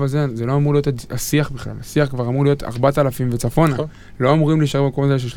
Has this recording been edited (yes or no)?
no